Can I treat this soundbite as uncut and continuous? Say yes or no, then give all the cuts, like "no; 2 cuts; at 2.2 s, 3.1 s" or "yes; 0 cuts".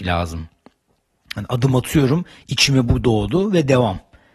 yes; 0 cuts